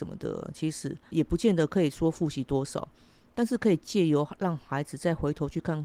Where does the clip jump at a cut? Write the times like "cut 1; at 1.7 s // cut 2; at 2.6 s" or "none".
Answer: cut 1; at 1.1 s